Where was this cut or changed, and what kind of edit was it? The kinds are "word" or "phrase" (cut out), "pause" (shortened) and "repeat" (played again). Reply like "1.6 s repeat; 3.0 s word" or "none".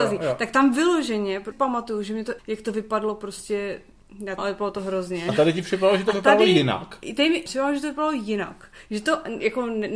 1.5 s word; 2.4 s word; 4.4 s word; 7.5 s word